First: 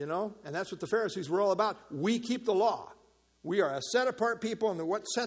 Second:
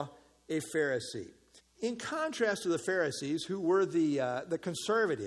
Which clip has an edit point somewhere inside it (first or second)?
second